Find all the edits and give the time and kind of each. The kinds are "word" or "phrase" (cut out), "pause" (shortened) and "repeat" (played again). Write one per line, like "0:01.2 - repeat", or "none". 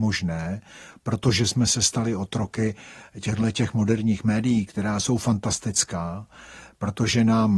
none